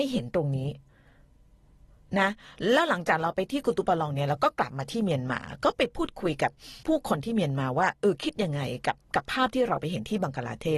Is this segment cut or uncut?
cut